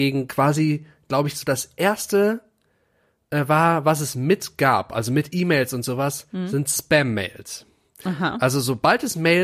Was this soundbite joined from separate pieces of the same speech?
no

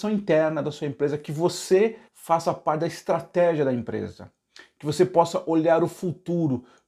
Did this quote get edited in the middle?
yes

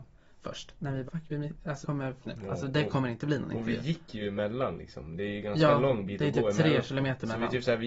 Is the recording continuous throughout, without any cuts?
no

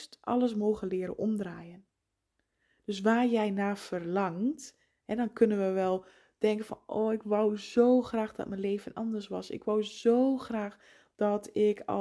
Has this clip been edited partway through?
no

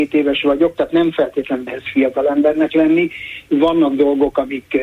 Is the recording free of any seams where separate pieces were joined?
no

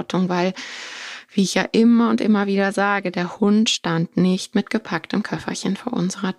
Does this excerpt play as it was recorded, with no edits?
yes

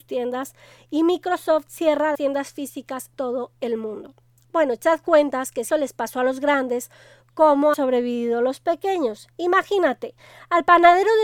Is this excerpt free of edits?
no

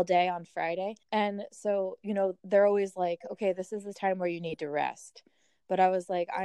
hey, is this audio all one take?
no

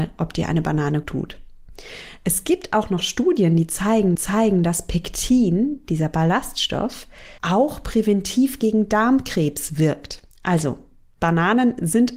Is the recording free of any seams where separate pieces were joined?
no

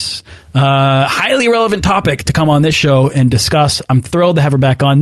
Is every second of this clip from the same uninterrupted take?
yes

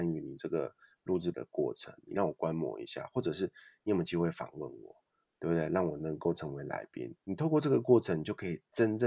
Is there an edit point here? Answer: yes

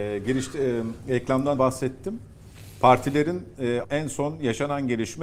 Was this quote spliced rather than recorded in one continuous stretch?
yes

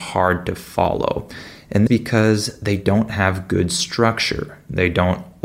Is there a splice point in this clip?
yes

